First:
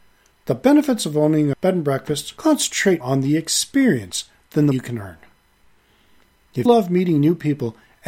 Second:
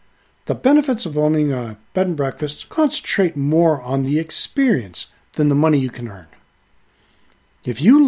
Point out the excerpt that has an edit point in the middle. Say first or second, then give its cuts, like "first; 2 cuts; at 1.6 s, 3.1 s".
first; 4 cuts; at 1.5 s, 3.0 s, 4.7 s, 6.7 s